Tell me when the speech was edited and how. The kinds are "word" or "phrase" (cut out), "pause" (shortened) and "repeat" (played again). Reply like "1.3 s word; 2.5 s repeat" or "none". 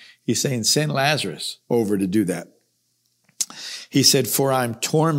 1.6 s pause